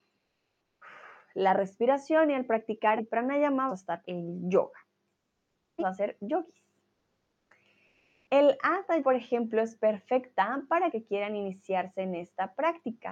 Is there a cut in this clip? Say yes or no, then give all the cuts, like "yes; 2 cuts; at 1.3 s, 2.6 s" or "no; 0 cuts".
yes; 6 cuts; at 3.0 s, 3.7 s, 4.0 s, 5.8 s, 9.0 s, 10.9 s